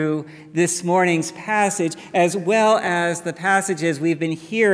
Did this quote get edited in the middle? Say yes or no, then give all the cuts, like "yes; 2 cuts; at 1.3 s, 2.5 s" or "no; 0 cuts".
no; 0 cuts